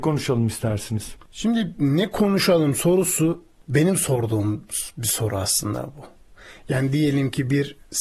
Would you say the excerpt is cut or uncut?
uncut